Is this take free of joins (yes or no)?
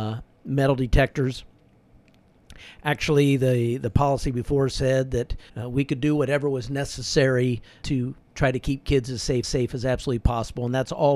no